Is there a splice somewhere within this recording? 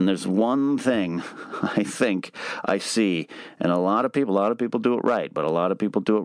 no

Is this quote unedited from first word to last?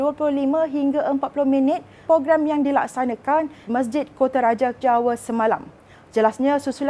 no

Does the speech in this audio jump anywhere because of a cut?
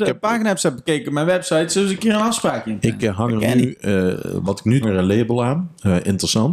yes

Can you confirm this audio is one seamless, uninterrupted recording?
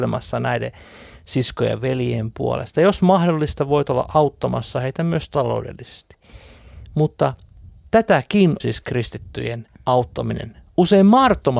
no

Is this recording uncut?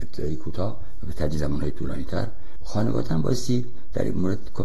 yes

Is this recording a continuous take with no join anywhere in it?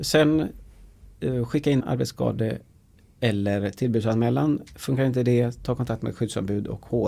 no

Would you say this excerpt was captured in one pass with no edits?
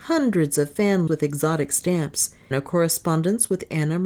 no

